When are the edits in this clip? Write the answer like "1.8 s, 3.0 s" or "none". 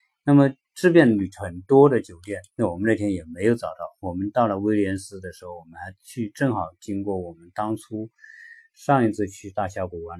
2.5 s